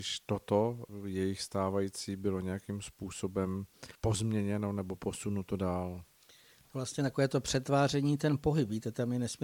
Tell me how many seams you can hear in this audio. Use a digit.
1